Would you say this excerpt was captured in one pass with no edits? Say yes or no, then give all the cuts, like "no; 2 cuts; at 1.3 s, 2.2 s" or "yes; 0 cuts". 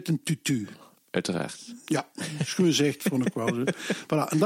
yes; 0 cuts